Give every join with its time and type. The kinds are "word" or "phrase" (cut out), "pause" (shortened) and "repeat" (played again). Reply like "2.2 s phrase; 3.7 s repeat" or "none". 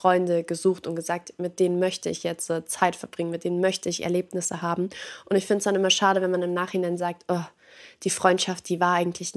none